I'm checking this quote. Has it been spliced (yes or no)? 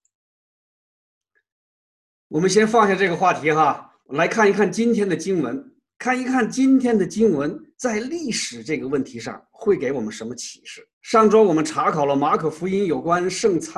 yes